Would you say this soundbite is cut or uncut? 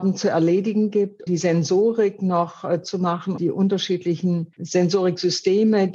cut